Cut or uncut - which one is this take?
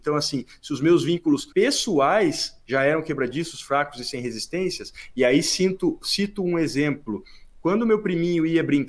cut